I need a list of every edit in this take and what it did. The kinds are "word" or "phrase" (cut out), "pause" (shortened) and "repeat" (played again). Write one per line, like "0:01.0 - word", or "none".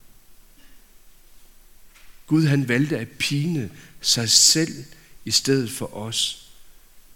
none